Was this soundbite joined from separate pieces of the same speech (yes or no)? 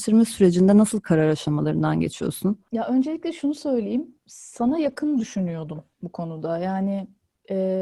yes